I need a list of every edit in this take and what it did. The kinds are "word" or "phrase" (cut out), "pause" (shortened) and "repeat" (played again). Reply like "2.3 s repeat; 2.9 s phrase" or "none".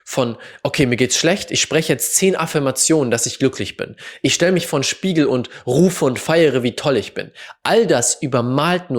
none